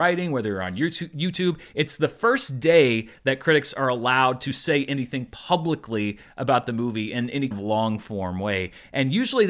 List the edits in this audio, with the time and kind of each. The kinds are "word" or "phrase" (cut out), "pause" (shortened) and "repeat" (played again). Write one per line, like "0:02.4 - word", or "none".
0:07.5 - word

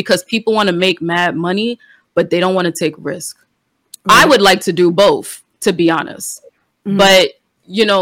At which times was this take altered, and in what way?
none

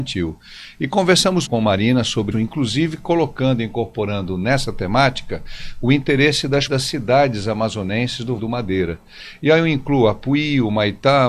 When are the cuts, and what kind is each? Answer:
0:01.5 - word
0:02.3 - word
0:06.7 - word
0:08.4 - word

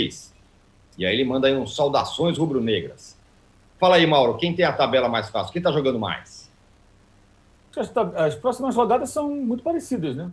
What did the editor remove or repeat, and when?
none

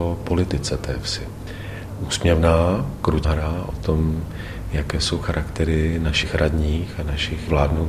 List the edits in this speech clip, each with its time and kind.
0:03.2 - word

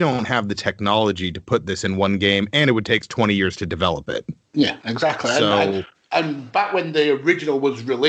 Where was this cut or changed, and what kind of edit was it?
0:03.0 - word
0:05.9 - pause

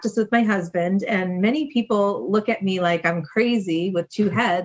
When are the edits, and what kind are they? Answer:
none

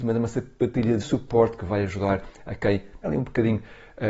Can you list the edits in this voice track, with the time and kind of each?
0:01.0 - word
0:03.0 - word

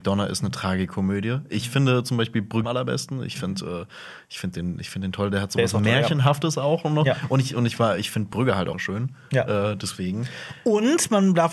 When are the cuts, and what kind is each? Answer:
0:02.6 - phrase
0:08.7 - word

